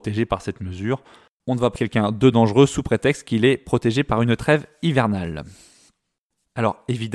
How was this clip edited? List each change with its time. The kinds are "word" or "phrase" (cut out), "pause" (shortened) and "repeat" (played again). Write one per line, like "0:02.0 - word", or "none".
0:01.7 - word